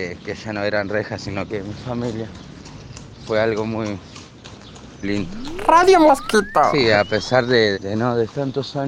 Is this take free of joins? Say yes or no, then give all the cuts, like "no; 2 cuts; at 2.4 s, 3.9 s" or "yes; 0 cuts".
no; 3 cuts; at 1.5 s, 5.0 s, 7.7 s